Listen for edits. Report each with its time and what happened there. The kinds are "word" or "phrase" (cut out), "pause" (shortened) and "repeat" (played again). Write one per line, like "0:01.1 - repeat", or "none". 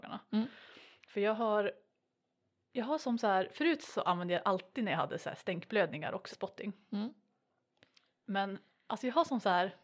0:06.3 - word